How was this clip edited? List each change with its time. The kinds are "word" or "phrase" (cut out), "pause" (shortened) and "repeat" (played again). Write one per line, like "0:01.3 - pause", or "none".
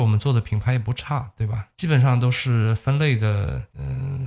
none

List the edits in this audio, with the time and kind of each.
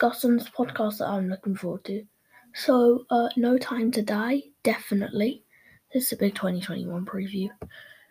none

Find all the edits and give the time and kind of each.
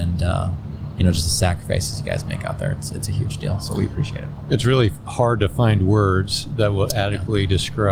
none

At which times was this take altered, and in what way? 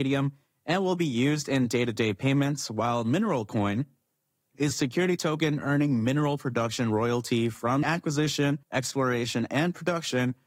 0:04.7 - word
0:07.8 - word
0:08.6 - pause

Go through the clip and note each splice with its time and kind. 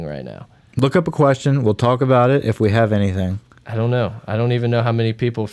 none

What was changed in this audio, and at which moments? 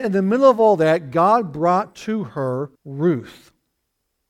0:02.7 - pause

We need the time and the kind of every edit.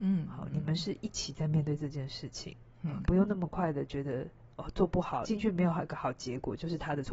0:03.0 - word
0:05.2 - word

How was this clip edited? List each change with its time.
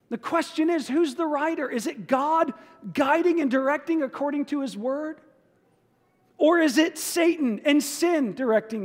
none

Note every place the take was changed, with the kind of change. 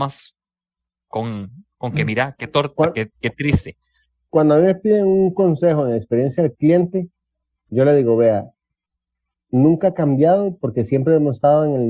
none

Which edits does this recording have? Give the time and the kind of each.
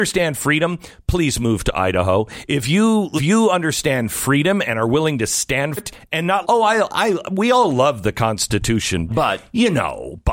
0:03.2 - word
0:05.8 - word
0:06.4 - word
0:09.1 - word

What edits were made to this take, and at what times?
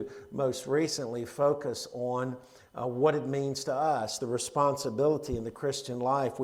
none

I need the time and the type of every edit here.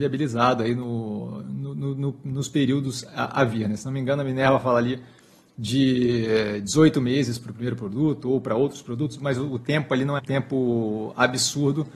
0:10.2 - word

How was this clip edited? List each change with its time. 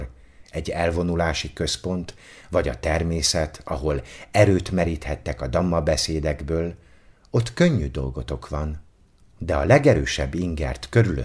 none

